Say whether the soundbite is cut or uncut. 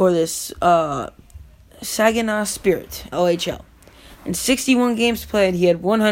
cut